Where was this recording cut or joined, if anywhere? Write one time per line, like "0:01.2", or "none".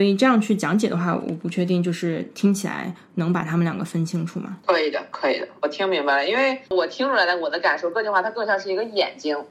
0:04.6
0:06.6